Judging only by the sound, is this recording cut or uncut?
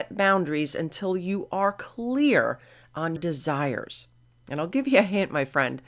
cut